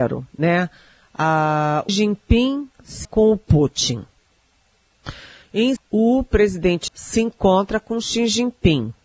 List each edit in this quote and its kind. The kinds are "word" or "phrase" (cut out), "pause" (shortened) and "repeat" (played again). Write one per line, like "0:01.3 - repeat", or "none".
0:01.9 - word
0:03.0 - word
0:05.8 - word
0:06.9 - word

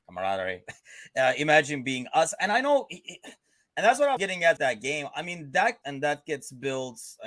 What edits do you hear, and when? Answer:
0:04.2 - word
0:04.6 - word
0:05.8 - word

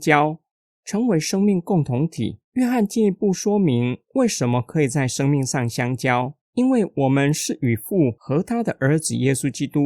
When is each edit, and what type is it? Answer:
0:02.4 - pause
0:06.5 - pause

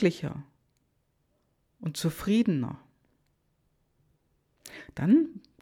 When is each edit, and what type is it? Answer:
none

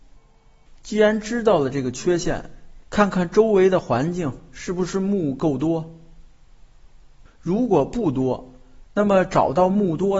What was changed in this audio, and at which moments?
0:02.8 - pause

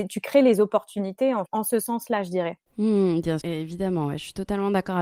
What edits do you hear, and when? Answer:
0:01.5 - word
0:02.7 - pause
0:03.4 - word

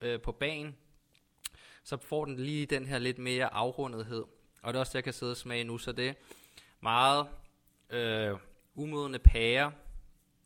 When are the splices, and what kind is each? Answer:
none

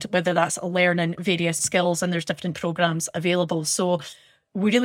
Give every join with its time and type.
0:01.6 - word
0:02.5 - word

